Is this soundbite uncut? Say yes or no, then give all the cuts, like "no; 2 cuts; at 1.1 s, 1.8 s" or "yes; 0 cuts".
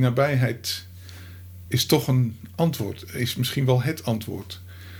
yes; 0 cuts